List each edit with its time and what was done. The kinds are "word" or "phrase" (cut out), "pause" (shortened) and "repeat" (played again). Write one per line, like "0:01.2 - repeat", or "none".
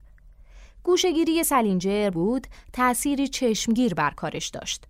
0:02.1 - phrase